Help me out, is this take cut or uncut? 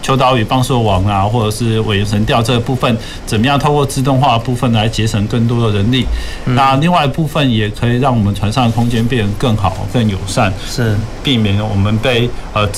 uncut